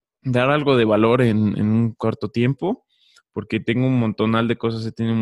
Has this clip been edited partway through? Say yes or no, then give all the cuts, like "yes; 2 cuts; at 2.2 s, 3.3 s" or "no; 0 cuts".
no; 0 cuts